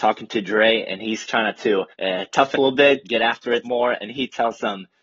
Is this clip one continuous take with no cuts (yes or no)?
no